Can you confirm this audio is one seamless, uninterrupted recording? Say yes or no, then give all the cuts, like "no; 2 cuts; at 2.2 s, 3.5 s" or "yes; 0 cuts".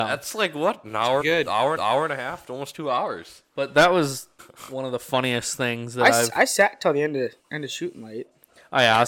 no; 4 cuts; at 1.2 s, 1.8 s, 4.4 s, 7.4 s